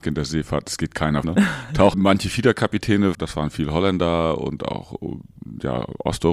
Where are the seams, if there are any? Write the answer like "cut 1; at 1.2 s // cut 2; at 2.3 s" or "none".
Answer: cut 1; at 1.2 s // cut 2; at 1.9 s // cut 3; at 3.1 s